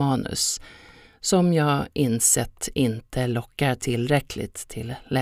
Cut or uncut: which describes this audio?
uncut